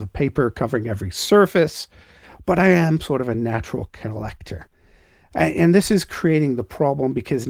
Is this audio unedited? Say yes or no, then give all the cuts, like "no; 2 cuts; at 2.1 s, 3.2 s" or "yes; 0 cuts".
yes; 0 cuts